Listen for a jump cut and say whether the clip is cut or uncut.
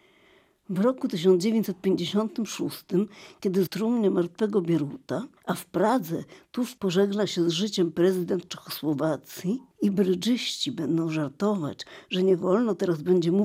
cut